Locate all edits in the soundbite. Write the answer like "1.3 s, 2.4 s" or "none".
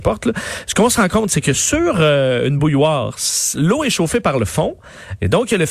none